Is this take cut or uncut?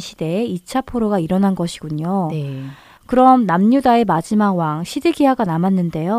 uncut